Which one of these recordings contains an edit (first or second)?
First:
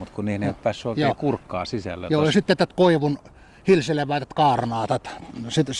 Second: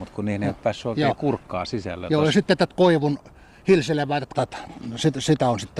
second